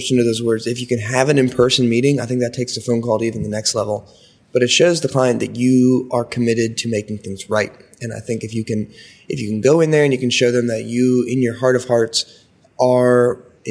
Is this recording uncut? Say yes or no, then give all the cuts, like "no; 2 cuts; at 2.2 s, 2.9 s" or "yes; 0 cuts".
yes; 0 cuts